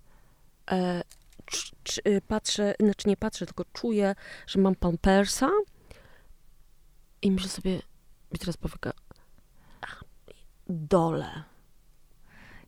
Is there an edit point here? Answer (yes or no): no